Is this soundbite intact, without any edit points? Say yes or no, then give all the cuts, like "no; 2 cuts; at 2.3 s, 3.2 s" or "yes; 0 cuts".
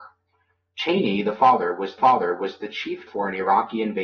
no; 2 cuts; at 2.0 s, 3.1 s